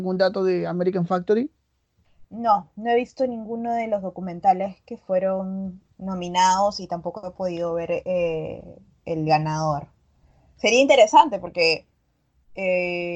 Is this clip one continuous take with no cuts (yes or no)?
yes